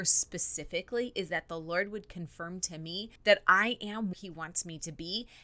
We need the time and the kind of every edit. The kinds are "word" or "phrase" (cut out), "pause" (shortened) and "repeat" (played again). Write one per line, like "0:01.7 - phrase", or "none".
0:03.2 - pause
0:04.1 - word